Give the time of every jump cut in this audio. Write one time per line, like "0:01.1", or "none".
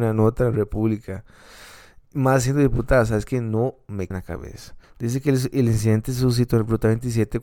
0:04.1
0:04.8